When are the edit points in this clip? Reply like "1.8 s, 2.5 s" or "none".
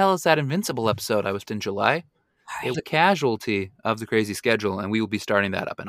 1.5 s, 2.7 s